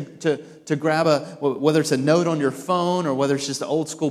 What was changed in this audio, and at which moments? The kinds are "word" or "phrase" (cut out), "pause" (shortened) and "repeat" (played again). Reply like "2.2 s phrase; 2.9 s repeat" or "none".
none